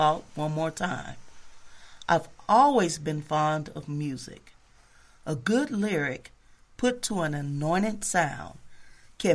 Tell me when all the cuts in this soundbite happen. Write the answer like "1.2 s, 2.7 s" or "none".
none